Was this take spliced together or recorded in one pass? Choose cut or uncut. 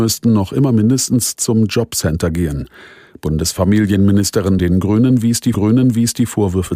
cut